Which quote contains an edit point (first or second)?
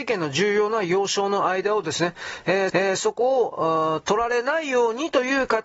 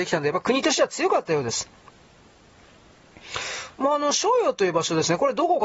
first